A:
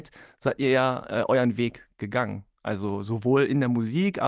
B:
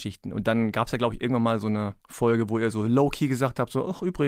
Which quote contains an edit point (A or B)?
B